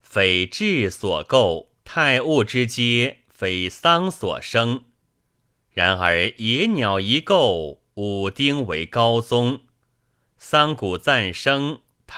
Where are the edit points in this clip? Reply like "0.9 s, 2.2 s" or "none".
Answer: 1.8 s